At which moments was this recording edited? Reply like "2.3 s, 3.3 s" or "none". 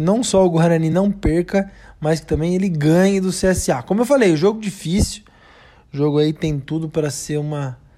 none